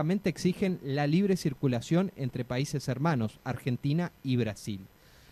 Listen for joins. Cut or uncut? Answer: uncut